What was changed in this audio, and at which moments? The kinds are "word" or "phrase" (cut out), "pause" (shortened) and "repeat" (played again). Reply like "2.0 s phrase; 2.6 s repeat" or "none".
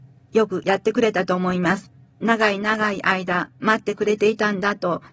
none